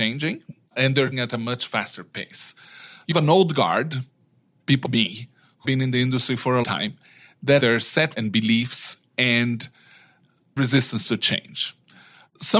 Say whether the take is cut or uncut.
cut